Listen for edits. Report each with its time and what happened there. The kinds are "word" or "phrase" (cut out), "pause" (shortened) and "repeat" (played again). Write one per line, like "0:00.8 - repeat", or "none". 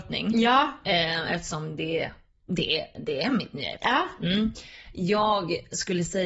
none